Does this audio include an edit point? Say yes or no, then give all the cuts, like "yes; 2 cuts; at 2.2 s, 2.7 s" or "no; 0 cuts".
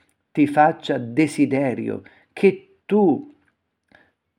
no; 0 cuts